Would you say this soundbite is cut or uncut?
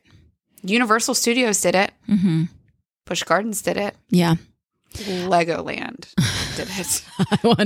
uncut